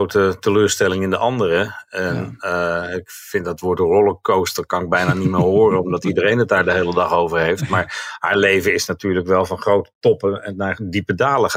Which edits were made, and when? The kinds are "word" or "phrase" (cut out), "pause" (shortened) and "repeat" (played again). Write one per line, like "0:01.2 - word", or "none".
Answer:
none